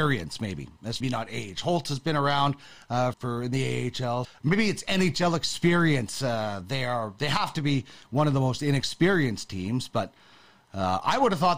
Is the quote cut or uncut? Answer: cut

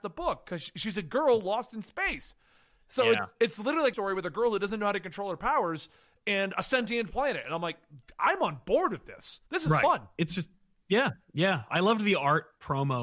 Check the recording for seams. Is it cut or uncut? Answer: cut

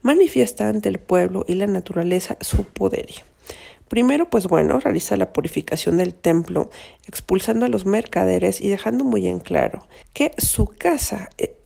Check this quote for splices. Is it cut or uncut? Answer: cut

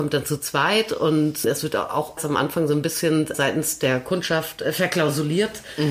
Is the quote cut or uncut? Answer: cut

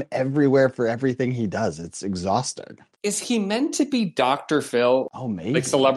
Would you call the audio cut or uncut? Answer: uncut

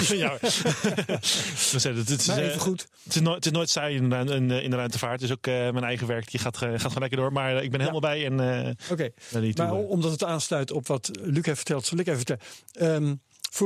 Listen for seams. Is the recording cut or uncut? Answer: uncut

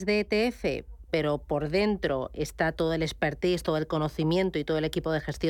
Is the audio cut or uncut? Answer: uncut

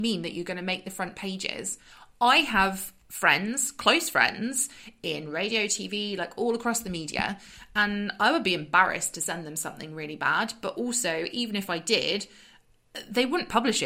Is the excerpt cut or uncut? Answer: uncut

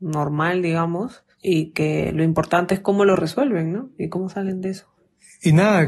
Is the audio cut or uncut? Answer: uncut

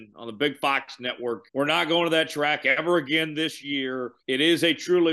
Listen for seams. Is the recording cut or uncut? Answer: cut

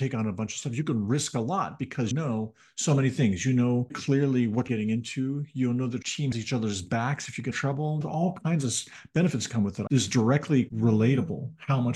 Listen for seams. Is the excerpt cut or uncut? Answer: cut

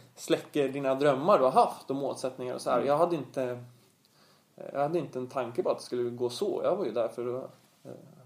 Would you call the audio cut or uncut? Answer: uncut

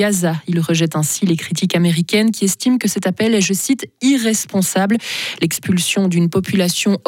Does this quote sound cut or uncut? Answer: uncut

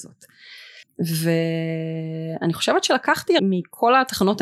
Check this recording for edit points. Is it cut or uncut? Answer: cut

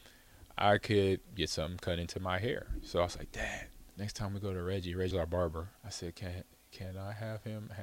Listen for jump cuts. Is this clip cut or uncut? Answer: cut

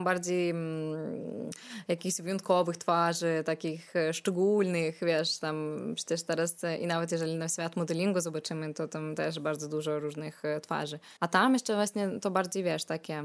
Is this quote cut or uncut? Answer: cut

